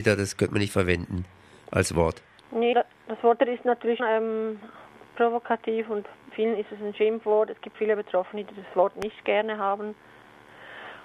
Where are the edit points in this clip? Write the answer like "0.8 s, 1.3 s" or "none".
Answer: 2.7 s, 3.4 s, 4.0 s, 6.3 s, 7.7 s